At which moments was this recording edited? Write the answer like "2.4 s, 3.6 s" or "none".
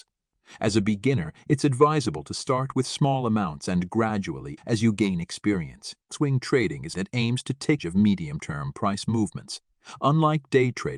4.6 s, 6.9 s, 7.8 s